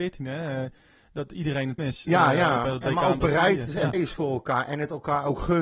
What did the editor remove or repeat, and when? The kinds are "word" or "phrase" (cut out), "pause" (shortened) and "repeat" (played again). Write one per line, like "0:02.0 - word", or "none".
0:01.3 - word
0:01.8 - word
0:03.9 - word